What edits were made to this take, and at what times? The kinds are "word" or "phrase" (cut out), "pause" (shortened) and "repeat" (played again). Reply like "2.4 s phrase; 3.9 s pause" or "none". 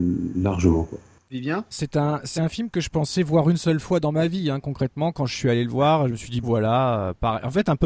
1.7 s word; 2.4 s word; 6.4 s word